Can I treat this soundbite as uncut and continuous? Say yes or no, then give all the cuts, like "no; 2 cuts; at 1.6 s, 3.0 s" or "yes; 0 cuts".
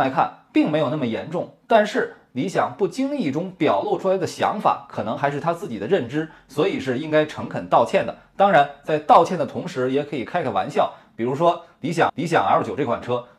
no; 1 cut; at 12.1 s